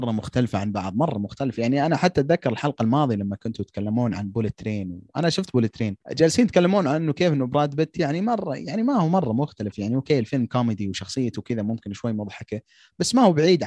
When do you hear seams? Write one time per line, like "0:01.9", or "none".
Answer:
0:06.0